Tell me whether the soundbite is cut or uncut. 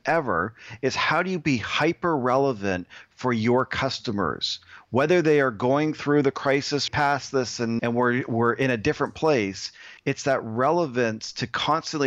cut